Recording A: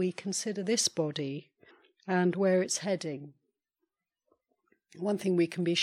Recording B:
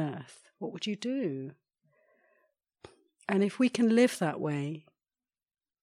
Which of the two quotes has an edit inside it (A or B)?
A